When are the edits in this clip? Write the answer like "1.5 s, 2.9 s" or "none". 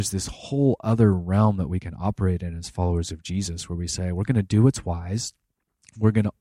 none